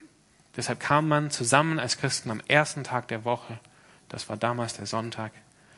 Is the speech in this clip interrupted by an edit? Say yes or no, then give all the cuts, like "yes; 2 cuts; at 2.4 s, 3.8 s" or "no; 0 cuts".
no; 0 cuts